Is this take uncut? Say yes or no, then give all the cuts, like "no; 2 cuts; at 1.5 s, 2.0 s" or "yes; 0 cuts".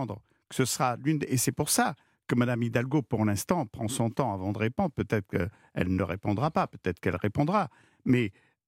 yes; 0 cuts